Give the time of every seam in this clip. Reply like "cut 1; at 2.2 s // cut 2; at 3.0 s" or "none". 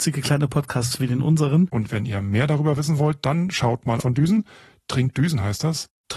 cut 1; at 4.0 s